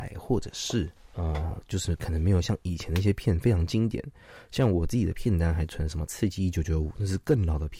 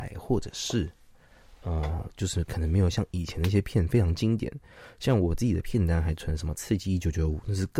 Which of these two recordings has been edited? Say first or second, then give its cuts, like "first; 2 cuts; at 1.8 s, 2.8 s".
first; 1 cut; at 1.0 s